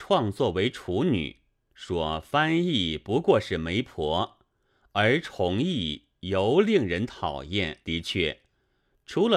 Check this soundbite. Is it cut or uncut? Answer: cut